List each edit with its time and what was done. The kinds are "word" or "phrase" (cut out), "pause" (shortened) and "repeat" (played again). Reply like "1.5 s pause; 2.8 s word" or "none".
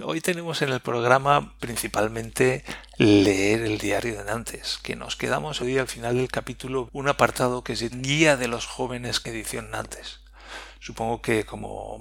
1.6 s word; 5.6 s phrase; 6.9 s word; 7.9 s word; 9.2 s word